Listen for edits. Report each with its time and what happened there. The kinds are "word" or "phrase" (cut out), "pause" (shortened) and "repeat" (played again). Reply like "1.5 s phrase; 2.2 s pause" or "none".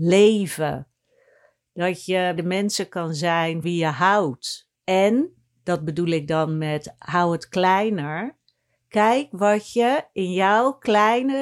2.4 s word; 3.6 s word